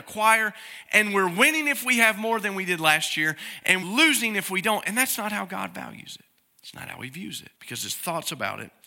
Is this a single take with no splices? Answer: no; 3 cuts; at 3.8 s, 6.4 s, 7.6 s

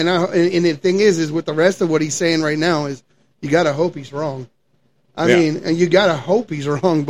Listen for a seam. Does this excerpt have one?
no; 0 cuts

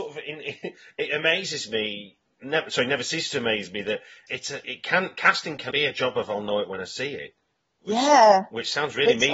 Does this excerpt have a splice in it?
yes; 3 cuts; at 4.3 s, 4.6 s, 5.7 s

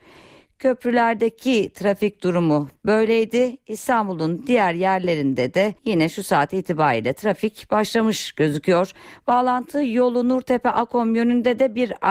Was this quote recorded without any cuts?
no; 1 cut; at 5.8 s

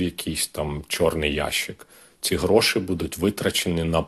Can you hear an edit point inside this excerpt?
no; 0 cuts

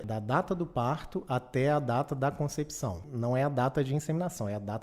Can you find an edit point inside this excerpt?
no; 0 cuts

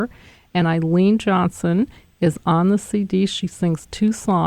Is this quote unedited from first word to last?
yes; 0 cuts

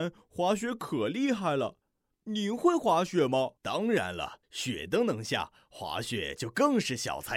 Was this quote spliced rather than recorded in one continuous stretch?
yes; 2 cuts; at 3.6 s, 4.4 s

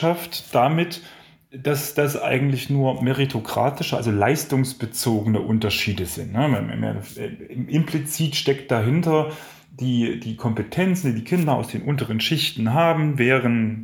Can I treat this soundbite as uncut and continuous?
yes; 0 cuts

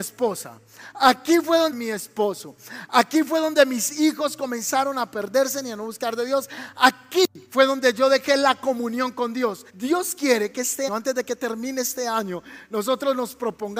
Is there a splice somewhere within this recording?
yes; 4 cuts; at 1.7 s, 7.5 s, 9.7 s, 10.9 s

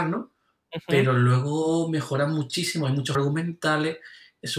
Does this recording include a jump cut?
yes; 1 cut; at 3.1 s

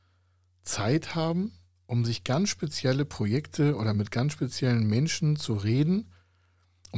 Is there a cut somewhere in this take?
no; 0 cuts

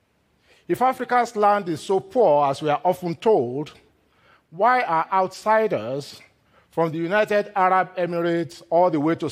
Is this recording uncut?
yes; 0 cuts

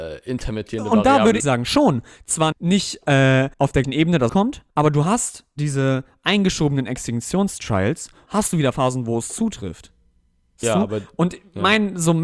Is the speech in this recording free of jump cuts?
no; 8 cuts; at 1.4 s, 2.5 s, 3.5 s, 3.8 s, 4.3 s, 4.7 s, 8.3 s, 10.6 s

